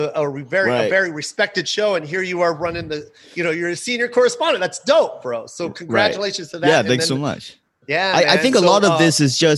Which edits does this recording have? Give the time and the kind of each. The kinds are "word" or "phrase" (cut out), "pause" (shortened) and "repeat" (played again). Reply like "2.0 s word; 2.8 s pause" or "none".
7.7 s pause